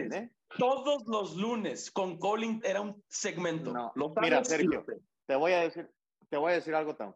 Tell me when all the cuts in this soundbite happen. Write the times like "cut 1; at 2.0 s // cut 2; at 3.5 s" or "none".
cut 1; at 2.6 s // cut 2; at 3.0 s